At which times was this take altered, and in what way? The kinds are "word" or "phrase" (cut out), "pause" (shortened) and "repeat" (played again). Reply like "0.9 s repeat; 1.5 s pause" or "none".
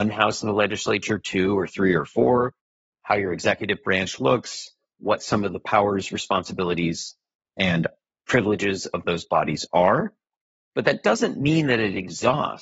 none